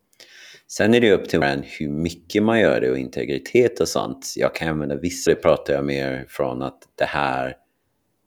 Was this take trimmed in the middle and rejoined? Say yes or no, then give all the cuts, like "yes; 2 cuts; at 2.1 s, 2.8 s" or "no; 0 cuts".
yes; 2 cuts; at 1.4 s, 5.3 s